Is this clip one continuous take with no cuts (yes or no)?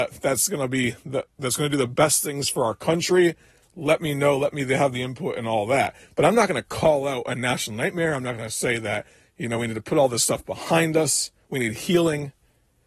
yes